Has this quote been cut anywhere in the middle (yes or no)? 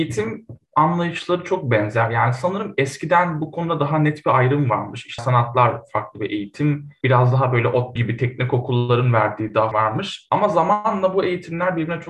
yes